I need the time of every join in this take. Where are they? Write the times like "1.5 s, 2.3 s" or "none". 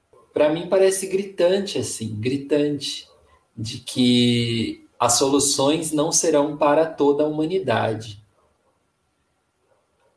4.9 s